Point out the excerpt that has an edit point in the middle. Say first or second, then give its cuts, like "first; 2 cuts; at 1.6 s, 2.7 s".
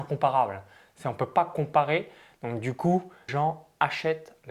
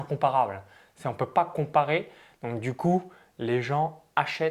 first; 1 cut; at 3.3 s